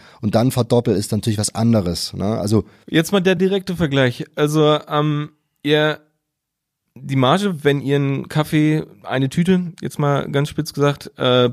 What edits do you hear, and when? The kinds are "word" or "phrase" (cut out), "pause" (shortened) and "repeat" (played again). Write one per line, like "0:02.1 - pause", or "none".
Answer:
none